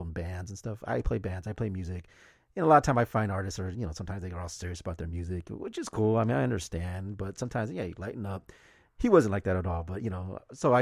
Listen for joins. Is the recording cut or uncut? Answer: uncut